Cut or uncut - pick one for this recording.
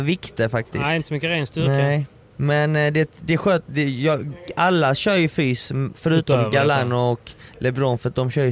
uncut